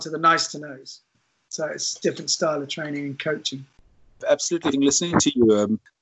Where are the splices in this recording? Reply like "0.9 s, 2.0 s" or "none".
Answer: 4.7 s